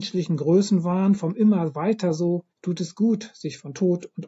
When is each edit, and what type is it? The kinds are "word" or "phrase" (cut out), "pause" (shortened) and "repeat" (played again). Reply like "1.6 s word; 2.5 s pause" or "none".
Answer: 2.5 s pause

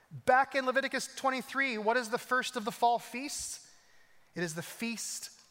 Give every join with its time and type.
none

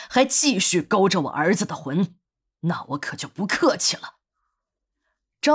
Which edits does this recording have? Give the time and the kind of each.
none

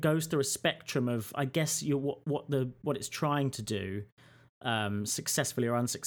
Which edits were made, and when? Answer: none

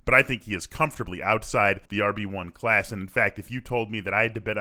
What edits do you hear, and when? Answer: 1.9 s pause

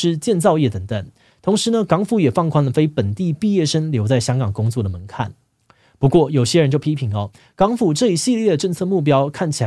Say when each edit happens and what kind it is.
none

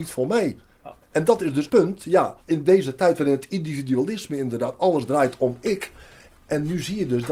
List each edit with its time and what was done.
1.0 s pause; 1.7 s word; 2.4 s pause

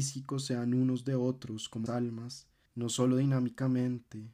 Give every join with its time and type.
1.9 s word; 2.7 s pause

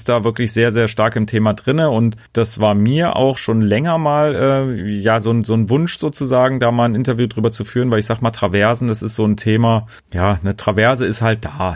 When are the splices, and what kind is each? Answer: 2.3 s pause; 10.0 s pause

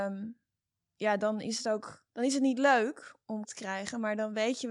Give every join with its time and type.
3.4 s word

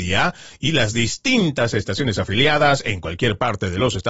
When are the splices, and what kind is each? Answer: none

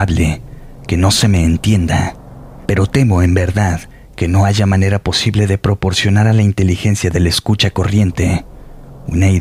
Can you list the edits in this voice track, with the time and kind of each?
3.9 s pause

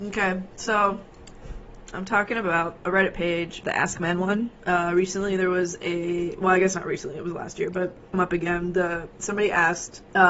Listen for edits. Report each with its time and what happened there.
8.1 s word

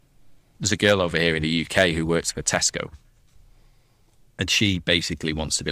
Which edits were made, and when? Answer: none

